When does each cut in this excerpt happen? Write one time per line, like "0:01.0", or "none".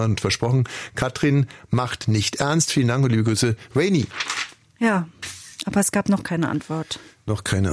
none